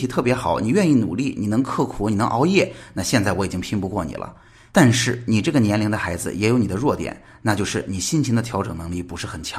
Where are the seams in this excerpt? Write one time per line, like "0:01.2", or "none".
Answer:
none